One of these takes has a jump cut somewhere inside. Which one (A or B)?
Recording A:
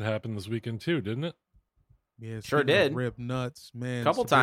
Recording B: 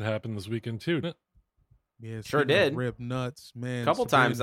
B